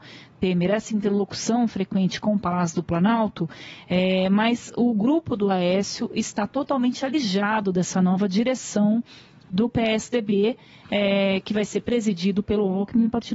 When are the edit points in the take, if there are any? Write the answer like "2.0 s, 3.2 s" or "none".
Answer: none